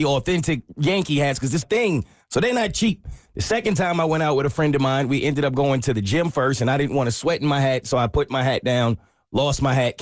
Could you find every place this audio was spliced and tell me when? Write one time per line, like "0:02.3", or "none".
0:01.6